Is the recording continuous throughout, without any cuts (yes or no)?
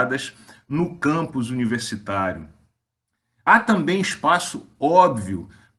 yes